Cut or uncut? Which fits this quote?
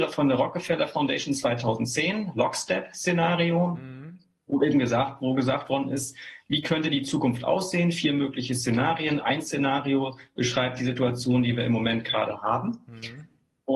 uncut